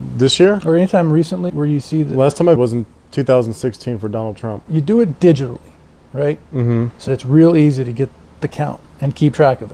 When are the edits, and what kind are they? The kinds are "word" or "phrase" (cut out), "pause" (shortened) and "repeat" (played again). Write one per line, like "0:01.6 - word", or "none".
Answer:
0:01.5 - word
0:02.6 - word
0:07.1 - word